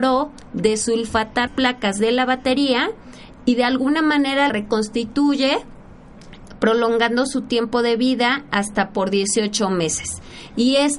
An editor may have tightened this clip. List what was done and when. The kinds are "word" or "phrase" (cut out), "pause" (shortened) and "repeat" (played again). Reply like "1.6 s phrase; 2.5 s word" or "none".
1.5 s word; 4.5 s word